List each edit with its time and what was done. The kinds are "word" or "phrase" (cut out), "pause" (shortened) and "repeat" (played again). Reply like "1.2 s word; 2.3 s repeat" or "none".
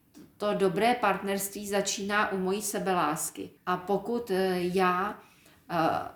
3.6 s pause

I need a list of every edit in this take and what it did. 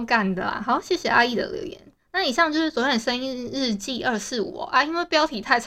none

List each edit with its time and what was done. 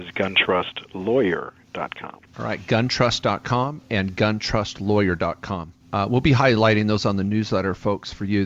2.3 s pause; 5.8 s pause

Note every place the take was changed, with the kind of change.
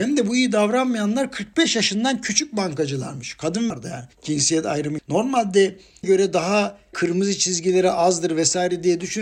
3.7 s phrase; 4.1 s pause; 5.0 s word; 6.0 s phrase; 6.9 s word

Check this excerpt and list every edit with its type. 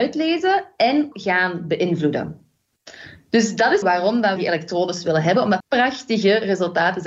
1.1 s word; 3.8 s phrase; 4.4 s phrase; 5.6 s word

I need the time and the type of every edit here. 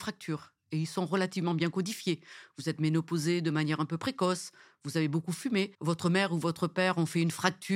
5.7 s pause

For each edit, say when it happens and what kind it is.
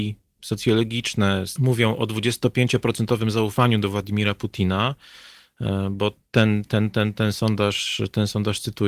1.6 s phrase

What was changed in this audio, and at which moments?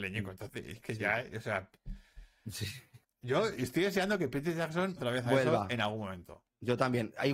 3.0 s pause; 5.0 s word

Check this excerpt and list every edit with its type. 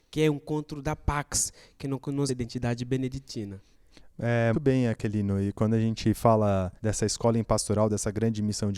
2.3 s phrase; 4.5 s word; 6.8 s pause

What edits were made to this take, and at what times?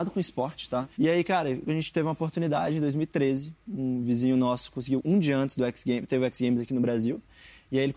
0.9 s pause

